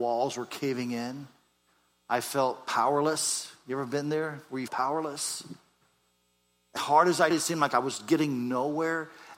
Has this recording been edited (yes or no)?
yes